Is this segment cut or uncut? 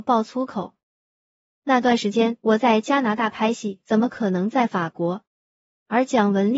cut